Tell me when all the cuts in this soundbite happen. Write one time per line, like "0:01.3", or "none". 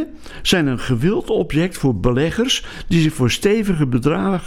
none